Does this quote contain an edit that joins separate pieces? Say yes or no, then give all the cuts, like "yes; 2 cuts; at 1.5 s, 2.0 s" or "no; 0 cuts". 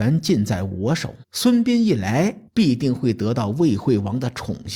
yes; 2 cuts; at 1.2 s, 2.5 s